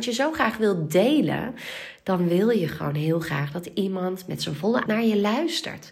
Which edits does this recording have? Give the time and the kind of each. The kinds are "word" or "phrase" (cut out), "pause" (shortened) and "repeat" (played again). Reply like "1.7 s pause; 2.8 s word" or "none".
4.9 s word